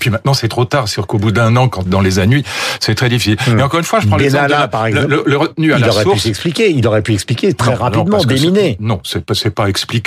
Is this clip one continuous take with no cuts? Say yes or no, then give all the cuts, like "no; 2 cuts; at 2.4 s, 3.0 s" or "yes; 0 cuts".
no; 1 cut; at 1.8 s